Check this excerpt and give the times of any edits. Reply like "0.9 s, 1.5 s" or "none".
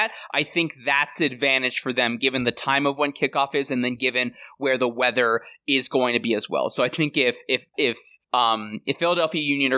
7.7 s, 8.2 s